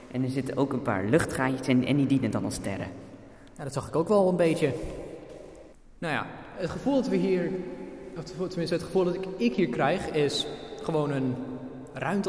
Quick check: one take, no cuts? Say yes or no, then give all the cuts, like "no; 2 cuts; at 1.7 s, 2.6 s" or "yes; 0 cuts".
yes; 0 cuts